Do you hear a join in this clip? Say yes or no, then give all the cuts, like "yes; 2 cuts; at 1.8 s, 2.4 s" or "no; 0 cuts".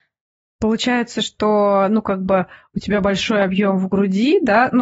no; 0 cuts